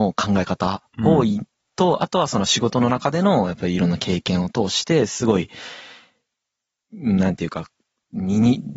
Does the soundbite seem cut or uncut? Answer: uncut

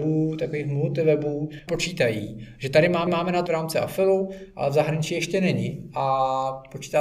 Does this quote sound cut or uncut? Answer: cut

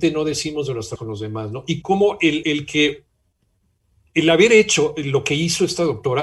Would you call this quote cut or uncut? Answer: cut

